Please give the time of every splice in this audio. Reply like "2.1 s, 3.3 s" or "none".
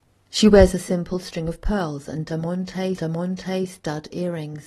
3.0 s